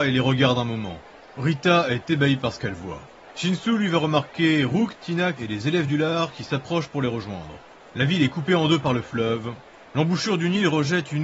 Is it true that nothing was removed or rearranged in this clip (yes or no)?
no